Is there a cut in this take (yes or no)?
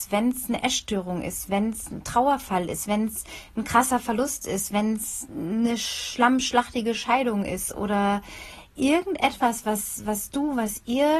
no